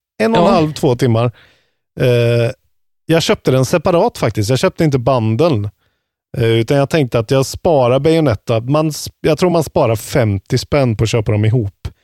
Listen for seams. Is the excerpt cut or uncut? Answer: uncut